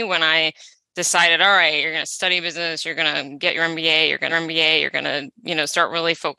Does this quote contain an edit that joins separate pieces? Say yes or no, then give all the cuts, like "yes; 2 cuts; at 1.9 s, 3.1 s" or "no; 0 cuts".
yes; 1 cut; at 4.3 s